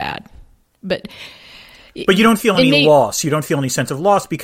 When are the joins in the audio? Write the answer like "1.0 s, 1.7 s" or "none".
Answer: none